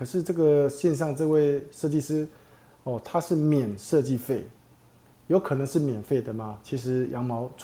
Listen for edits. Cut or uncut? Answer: uncut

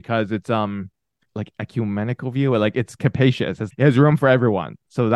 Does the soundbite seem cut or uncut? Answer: cut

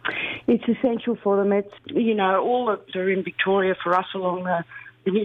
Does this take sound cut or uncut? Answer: cut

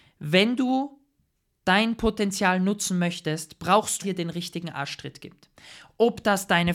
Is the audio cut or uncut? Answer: cut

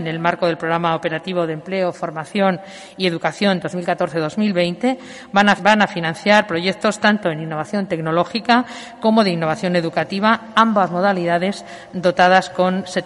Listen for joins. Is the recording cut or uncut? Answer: cut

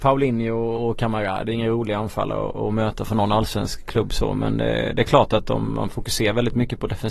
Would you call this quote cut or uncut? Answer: uncut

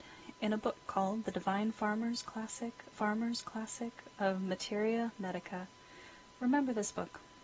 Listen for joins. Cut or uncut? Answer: cut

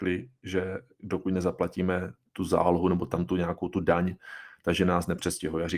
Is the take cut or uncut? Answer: uncut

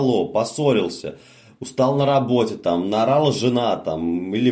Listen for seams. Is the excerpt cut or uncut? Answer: uncut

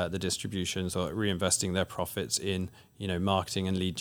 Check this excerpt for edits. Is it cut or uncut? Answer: uncut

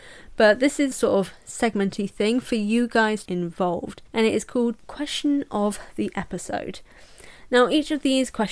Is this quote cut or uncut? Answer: cut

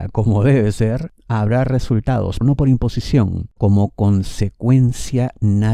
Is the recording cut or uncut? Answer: cut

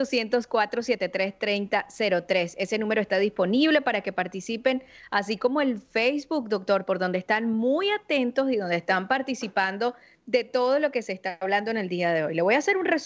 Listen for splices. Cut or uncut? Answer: uncut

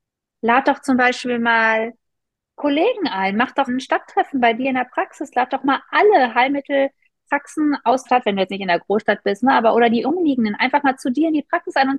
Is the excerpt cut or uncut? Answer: cut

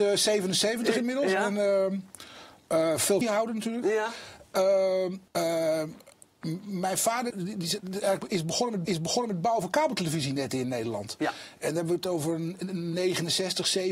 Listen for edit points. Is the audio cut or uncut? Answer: cut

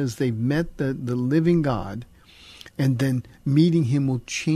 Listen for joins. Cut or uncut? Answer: uncut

